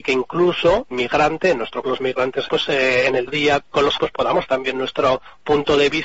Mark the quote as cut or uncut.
cut